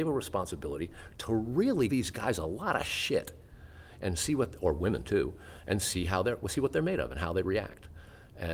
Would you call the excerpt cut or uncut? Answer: cut